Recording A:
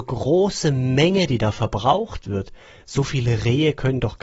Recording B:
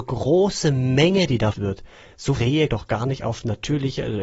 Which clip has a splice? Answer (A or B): B